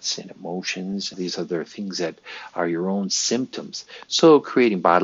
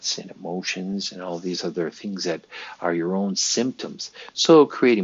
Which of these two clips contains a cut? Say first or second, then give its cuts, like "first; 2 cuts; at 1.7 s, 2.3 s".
first; 1 cut; at 1.1 s